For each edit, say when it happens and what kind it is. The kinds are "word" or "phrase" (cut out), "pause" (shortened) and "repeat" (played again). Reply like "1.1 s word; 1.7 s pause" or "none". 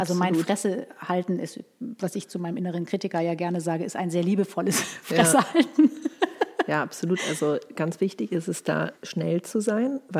9.0 s pause